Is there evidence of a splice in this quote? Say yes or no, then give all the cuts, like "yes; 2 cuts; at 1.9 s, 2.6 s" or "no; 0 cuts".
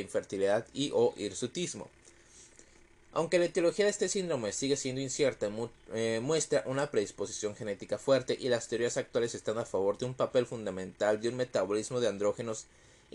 no; 0 cuts